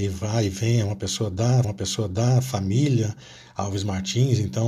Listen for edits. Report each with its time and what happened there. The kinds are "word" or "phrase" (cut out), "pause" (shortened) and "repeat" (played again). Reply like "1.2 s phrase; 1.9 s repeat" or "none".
1.6 s repeat